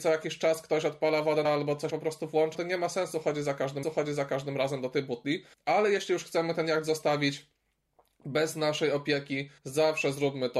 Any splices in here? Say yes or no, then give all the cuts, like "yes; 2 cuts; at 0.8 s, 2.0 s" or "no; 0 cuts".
yes; 6 cuts; at 1.4 s, 1.9 s, 2.5 s, 3.8 s, 5.5 s, 9.6 s